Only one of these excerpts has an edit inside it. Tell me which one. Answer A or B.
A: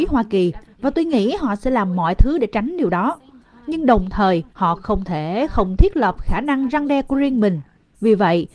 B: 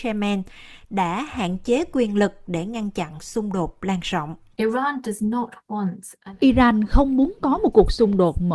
A